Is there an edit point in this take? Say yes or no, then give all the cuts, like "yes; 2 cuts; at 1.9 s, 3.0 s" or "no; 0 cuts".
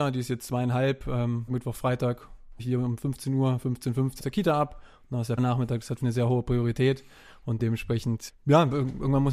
yes; 7 cuts; at 1.5 s, 2.6 s, 4.2 s, 5.4 s, 6.0 s, 7.6 s, 8.3 s